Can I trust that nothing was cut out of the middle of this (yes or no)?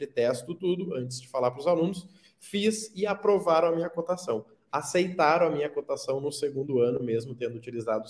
yes